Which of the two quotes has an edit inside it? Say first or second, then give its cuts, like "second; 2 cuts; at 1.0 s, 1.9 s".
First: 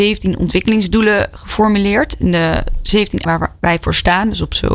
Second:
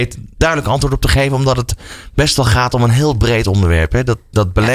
first; 1 cut; at 3.3 s